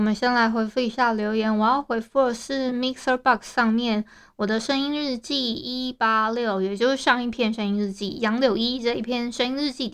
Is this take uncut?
yes; 0 cuts

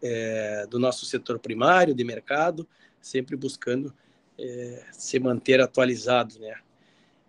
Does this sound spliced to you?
no; 0 cuts

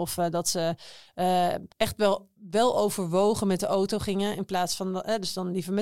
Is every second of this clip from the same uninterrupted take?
no; 1 cut; at 1.7 s

